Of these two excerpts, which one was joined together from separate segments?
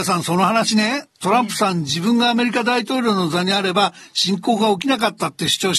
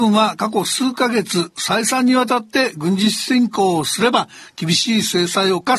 first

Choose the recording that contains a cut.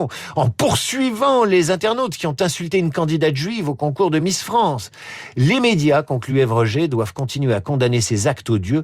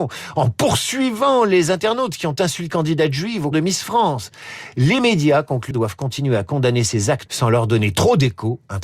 second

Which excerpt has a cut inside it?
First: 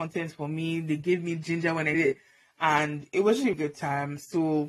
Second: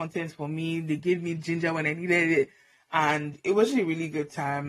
first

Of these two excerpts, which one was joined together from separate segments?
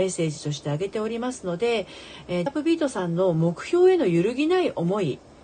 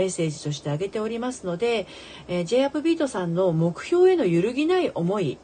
first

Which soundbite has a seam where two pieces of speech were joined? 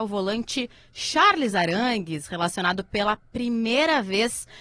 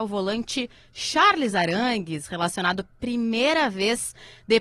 second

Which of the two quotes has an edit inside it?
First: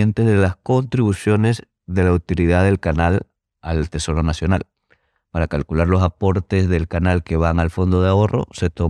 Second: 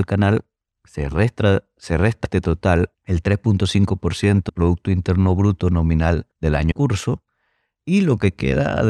second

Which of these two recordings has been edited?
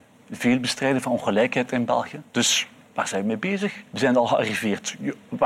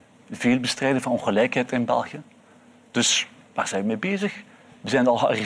first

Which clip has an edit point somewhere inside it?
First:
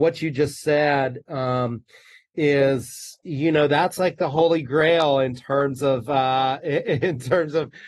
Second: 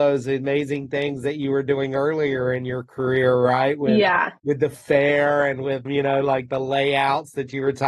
second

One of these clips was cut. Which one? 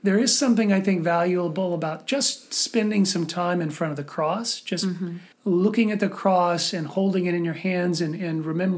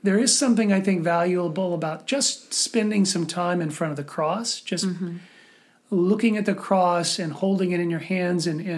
first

